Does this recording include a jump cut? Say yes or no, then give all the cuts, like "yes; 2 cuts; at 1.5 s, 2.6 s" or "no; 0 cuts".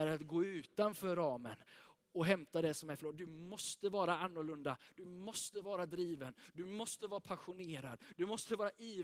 no; 0 cuts